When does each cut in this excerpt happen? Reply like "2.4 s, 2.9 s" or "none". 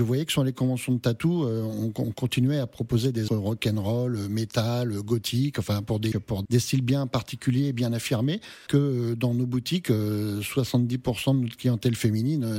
3.3 s, 6.1 s, 6.4 s, 8.7 s